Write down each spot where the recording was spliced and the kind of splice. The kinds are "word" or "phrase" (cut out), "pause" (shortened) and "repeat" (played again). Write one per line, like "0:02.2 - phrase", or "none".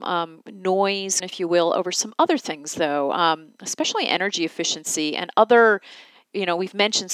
0:01.2 - word